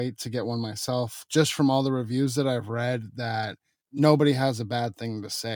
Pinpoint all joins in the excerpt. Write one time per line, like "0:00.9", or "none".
0:03.8